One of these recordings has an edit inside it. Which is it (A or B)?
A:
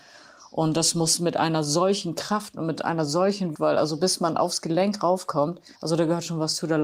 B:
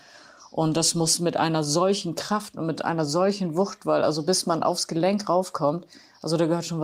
A